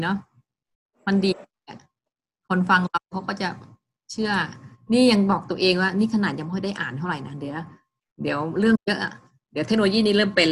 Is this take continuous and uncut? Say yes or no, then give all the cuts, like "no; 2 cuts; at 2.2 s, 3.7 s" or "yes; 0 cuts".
yes; 0 cuts